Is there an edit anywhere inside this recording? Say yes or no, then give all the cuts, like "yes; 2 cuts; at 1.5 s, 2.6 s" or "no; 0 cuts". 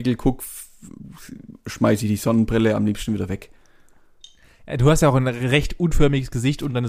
no; 0 cuts